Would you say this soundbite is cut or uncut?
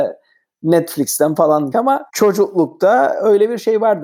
cut